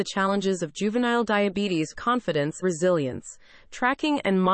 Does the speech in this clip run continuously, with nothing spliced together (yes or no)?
no